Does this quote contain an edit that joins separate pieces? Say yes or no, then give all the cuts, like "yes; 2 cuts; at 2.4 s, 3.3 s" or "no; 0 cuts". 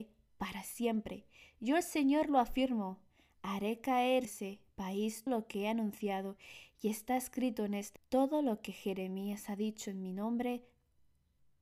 yes; 3 cuts; at 4.2 s, 5.3 s, 8.0 s